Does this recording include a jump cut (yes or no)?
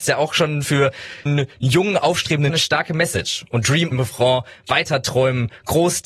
yes